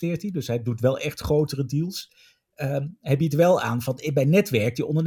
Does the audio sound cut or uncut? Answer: uncut